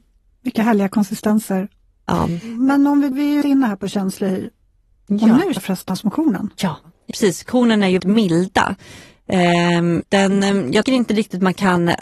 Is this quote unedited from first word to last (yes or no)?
no